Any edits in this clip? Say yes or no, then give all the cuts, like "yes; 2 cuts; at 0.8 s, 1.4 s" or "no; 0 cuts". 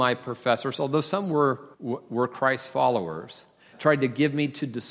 yes; 2 cuts; at 1.7 s, 3.7 s